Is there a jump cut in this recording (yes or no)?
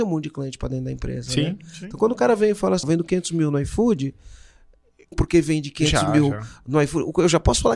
yes